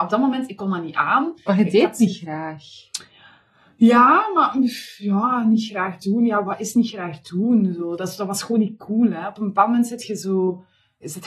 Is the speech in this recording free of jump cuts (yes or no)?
yes